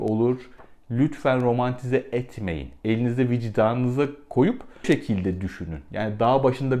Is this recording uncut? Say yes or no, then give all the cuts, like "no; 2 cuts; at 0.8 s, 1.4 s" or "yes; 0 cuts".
no; 1 cut; at 4.8 s